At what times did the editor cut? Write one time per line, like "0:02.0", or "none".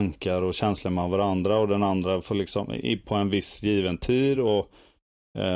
none